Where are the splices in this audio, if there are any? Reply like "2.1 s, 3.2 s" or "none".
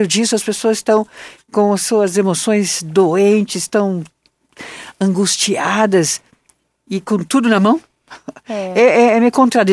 none

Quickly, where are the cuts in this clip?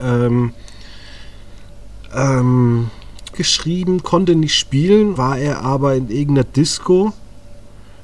3.3 s, 5.2 s

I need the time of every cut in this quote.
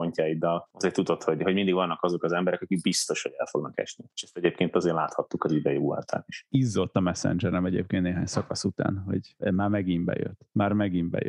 none

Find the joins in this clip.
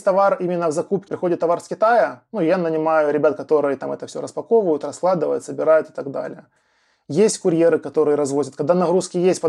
1.1 s

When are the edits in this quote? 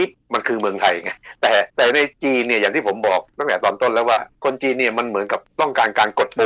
1.7 s, 4.3 s, 5.5 s

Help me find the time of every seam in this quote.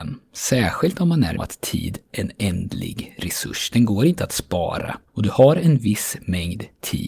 1.4 s, 2.1 s, 5.1 s

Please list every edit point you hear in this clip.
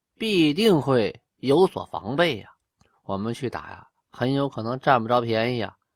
2.7 s

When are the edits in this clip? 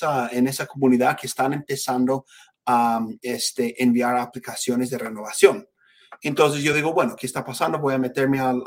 none

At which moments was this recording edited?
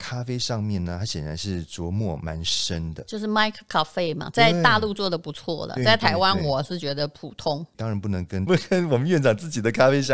7.7 s, 8.5 s

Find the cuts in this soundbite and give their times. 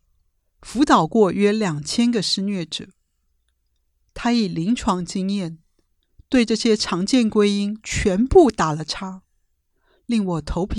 none

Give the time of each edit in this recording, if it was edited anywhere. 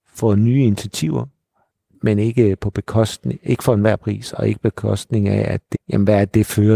5.7 s

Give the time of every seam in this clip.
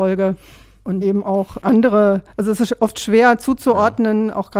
1.0 s, 2.3 s

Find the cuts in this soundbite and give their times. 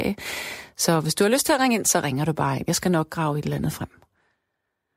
none

